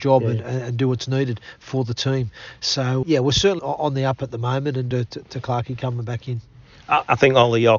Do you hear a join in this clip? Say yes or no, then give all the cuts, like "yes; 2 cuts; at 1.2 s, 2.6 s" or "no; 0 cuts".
yes; 3 cuts; at 3.0 s, 3.6 s, 4.9 s